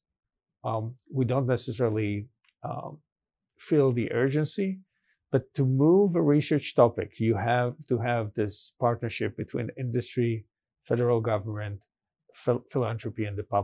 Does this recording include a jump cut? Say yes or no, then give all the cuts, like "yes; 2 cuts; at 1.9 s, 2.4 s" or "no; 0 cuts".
no; 0 cuts